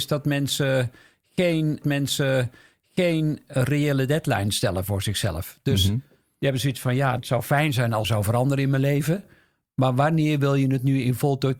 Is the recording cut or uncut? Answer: cut